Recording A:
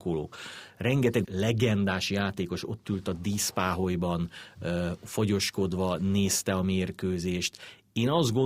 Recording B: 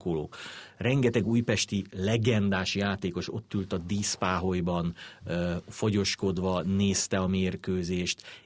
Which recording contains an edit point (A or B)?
A